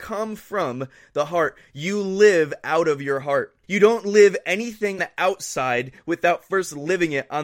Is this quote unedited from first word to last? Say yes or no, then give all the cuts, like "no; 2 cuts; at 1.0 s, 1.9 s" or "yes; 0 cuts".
no; 2 cuts; at 3.6 s, 5.0 s